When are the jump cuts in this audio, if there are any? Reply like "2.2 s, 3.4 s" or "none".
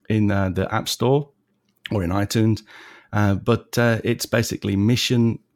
none